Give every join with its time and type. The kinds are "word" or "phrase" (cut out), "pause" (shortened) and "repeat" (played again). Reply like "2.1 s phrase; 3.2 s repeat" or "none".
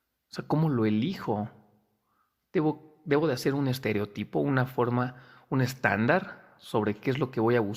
none